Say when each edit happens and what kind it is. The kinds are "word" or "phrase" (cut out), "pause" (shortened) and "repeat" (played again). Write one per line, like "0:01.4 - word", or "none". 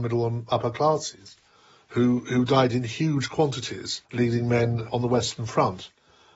0:04.0 - pause